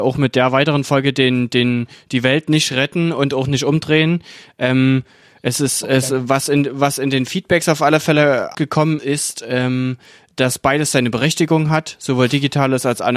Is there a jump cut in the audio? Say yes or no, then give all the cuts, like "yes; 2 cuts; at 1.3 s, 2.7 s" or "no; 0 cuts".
yes; 2 cuts; at 8.5 s, 9.0 s